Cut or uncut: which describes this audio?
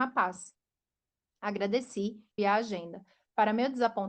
cut